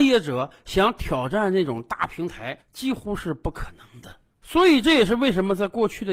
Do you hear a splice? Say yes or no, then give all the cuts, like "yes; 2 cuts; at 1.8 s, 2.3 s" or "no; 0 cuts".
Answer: yes; 1 cut; at 2.6 s